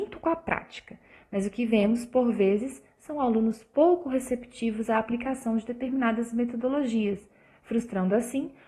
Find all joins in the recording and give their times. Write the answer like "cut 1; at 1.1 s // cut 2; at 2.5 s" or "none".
none